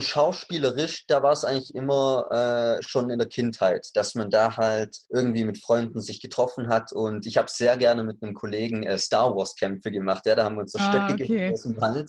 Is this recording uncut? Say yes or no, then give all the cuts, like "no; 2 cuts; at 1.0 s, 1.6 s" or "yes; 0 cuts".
no; 1 cut; at 5.0 s